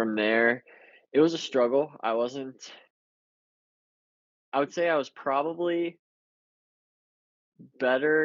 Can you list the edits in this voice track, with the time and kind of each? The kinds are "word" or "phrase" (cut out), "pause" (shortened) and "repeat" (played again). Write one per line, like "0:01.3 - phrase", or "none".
none